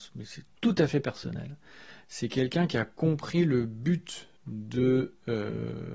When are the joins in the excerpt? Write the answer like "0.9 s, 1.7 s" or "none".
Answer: 4.4 s